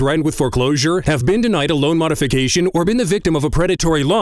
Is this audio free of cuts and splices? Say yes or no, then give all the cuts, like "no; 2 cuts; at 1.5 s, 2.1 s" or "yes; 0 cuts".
yes; 0 cuts